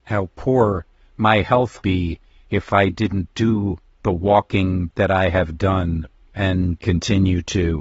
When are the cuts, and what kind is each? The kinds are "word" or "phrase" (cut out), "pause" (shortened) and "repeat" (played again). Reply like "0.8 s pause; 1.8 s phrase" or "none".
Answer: 1.8 s word; 6.1 s pause